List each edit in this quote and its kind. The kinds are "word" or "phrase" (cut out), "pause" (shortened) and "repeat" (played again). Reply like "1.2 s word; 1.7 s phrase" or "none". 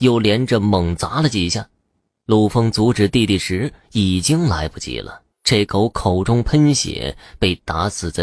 5.3 s pause